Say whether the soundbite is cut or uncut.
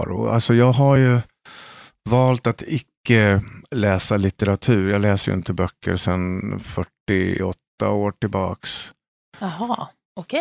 uncut